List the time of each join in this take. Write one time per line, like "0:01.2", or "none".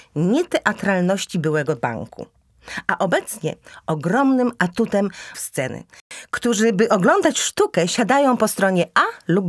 0:05.3

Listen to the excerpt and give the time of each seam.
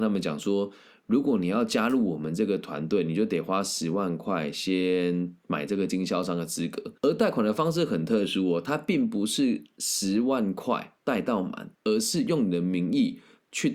0:07.0
0:11.0
0:11.7

